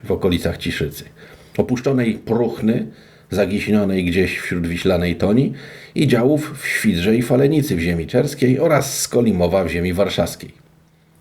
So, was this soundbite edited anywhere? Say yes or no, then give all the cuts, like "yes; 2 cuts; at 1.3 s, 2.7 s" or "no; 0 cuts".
no; 0 cuts